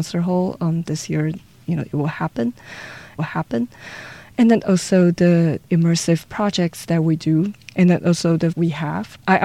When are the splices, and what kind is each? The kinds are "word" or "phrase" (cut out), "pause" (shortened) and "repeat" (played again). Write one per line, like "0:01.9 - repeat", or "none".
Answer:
0:03.2 - repeat
0:08.5 - phrase

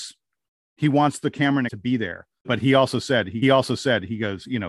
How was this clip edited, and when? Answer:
0:01.7 - word
0:02.4 - word
0:03.4 - repeat

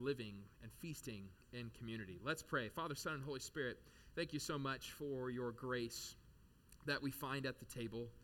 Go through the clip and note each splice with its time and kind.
none

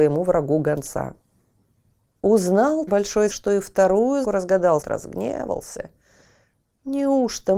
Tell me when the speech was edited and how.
0:02.9 - word
0:03.3 - word
0:04.2 - word
0:04.8 - word

